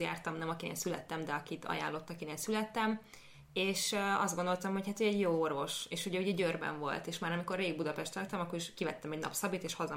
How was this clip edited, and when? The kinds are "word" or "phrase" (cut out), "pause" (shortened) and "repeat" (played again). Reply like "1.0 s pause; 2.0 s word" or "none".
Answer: none